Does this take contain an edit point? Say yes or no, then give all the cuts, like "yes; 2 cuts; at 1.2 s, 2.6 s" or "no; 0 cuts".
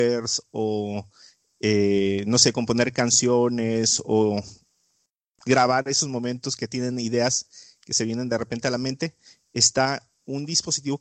no; 0 cuts